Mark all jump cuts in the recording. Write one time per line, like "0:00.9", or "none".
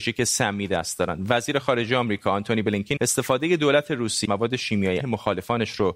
0:03.0
0:04.2
0:05.0